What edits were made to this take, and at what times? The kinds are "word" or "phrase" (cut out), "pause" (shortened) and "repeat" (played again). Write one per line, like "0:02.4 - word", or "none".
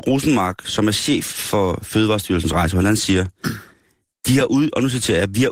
none